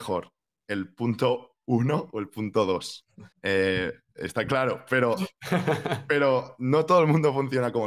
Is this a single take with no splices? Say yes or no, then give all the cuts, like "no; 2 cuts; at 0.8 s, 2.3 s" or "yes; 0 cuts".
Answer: no; 1 cut; at 3.3 s